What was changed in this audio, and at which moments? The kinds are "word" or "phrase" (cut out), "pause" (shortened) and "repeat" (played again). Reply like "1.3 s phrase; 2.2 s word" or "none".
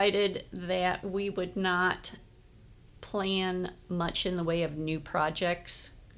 none